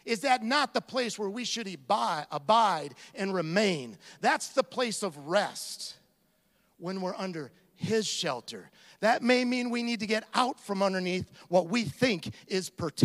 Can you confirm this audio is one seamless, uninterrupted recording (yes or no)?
yes